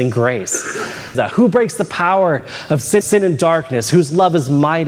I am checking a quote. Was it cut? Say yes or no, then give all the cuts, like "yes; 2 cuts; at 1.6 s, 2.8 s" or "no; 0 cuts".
yes; 2 cuts; at 1.1 s, 3.0 s